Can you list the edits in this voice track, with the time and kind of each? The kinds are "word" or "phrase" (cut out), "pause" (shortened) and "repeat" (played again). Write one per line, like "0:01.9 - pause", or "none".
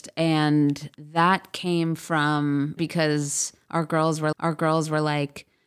0:00.9 - word
0:02.8 - phrase
0:04.3 - repeat